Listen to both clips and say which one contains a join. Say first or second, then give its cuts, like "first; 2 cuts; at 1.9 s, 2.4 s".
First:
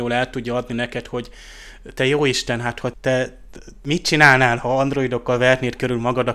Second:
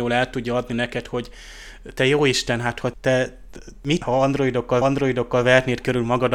second; 2 cuts; at 4.0 s, 4.8 s